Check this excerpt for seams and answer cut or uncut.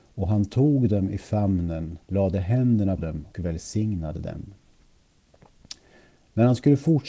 cut